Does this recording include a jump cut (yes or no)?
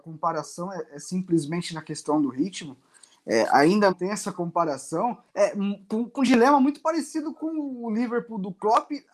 yes